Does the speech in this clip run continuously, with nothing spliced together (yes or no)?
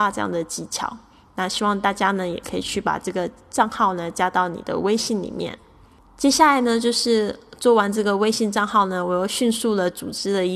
yes